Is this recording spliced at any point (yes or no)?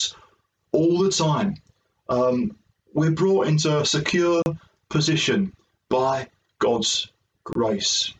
no